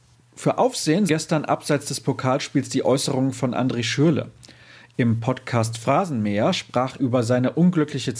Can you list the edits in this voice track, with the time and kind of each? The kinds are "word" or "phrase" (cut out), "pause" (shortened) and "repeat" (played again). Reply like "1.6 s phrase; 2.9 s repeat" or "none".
1.1 s word; 7.0 s word